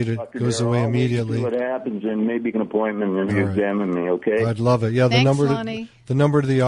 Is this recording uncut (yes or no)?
no